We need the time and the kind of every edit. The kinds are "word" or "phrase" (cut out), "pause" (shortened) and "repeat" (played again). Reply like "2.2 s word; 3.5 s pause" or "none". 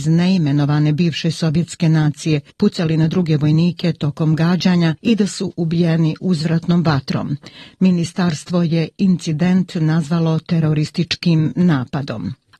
5.0 s pause